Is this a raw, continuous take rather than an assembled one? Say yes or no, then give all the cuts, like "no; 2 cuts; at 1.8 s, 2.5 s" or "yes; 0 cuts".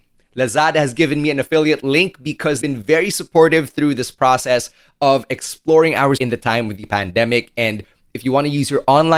no; 2 cuts; at 2.6 s, 6.2 s